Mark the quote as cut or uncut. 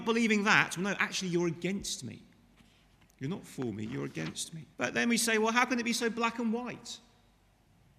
cut